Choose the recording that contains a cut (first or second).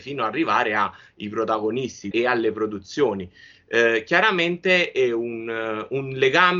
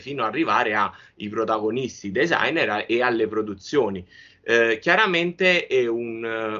first